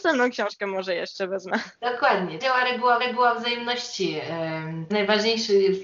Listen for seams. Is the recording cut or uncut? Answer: cut